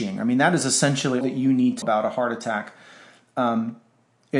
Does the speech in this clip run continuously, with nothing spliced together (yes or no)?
no